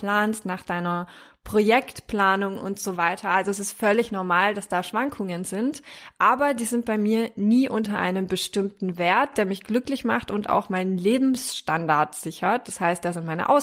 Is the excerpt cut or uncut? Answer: uncut